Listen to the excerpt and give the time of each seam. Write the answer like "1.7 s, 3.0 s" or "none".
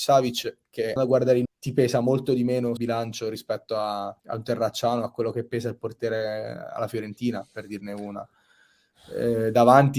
1.0 s, 1.4 s, 2.8 s, 4.2 s